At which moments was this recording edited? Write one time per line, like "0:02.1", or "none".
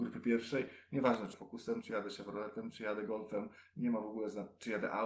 0:01.3